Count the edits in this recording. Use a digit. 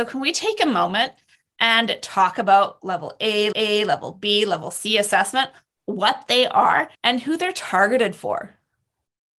2